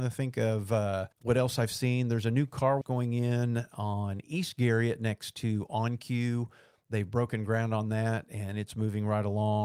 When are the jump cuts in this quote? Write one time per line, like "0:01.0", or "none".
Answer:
0:01.1
0:02.8